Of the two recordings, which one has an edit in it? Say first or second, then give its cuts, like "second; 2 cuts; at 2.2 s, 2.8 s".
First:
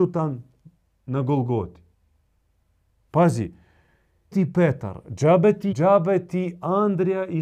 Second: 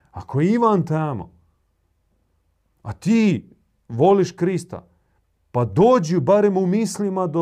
first; 2 cuts; at 4.3 s, 5.7 s